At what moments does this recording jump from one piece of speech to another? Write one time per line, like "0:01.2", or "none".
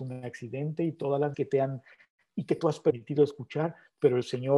0:01.3